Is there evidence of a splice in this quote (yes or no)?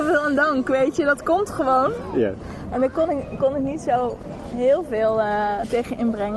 no